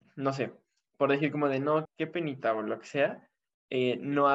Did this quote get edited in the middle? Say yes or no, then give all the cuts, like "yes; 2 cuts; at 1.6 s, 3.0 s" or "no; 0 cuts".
yes; 1 cut; at 1.8 s